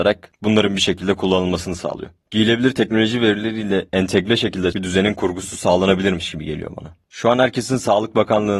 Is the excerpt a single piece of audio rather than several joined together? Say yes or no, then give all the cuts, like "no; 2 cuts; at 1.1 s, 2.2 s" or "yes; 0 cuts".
no; 1 cut; at 4.7 s